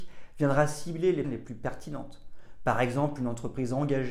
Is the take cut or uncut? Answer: cut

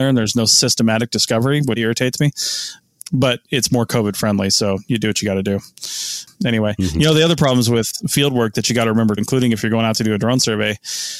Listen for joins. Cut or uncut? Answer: cut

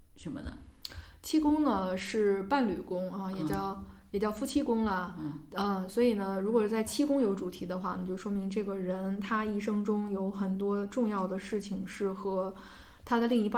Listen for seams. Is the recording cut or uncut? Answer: uncut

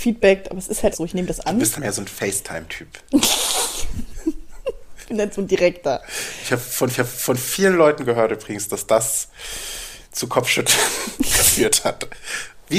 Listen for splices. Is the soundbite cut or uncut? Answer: cut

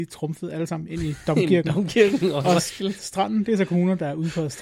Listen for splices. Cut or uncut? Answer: uncut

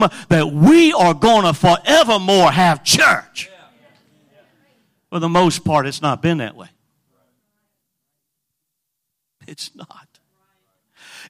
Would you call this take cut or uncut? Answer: uncut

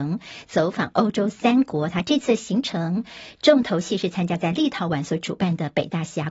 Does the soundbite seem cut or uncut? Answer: uncut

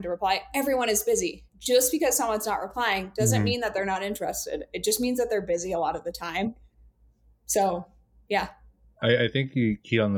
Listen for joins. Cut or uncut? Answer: uncut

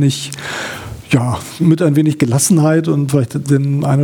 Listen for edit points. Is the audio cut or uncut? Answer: uncut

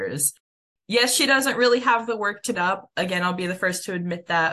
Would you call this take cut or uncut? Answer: cut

